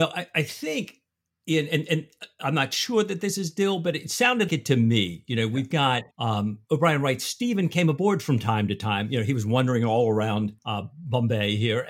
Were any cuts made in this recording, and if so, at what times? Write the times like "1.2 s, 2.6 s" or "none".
4.5 s, 6.1 s, 10.6 s